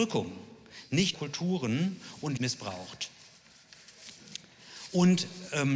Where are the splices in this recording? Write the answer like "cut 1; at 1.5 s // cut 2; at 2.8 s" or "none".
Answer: cut 1; at 1.1 s // cut 2; at 2.4 s